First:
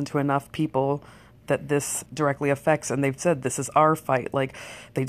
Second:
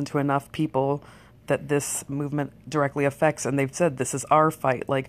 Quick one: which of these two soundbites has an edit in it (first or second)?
first